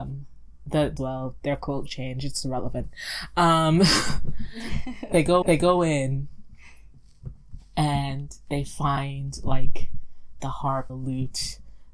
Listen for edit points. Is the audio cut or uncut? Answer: cut